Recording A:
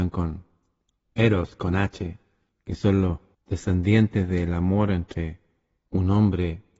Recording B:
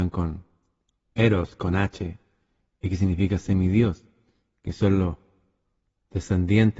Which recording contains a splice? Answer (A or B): A